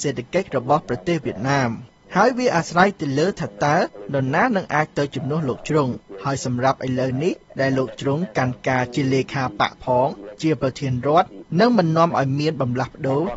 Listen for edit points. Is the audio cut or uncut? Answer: uncut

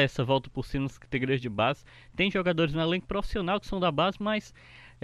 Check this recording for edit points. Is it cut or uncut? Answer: uncut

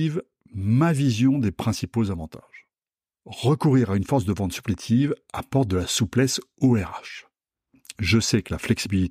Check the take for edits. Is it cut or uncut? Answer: uncut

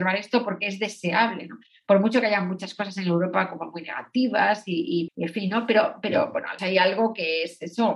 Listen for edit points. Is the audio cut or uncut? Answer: cut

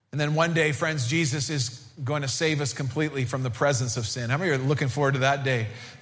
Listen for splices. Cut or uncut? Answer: uncut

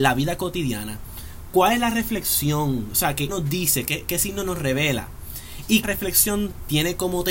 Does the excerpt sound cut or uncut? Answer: cut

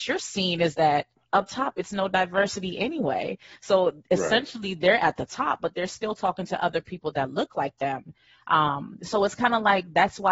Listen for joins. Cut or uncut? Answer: uncut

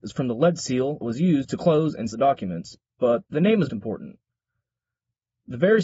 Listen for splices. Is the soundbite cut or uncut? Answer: cut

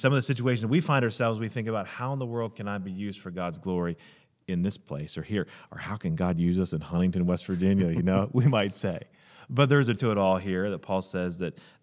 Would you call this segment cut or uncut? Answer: cut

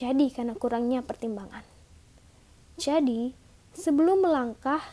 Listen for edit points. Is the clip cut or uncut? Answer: uncut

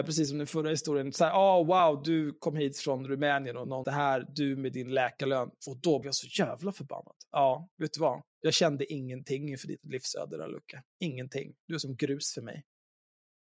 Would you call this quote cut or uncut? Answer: cut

